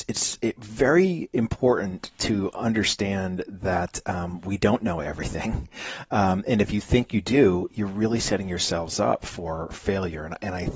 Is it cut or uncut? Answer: uncut